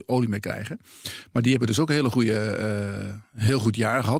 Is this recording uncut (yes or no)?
yes